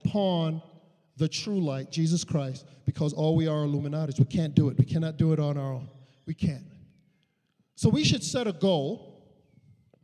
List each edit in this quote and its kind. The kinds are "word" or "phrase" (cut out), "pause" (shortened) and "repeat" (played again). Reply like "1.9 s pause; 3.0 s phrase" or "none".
none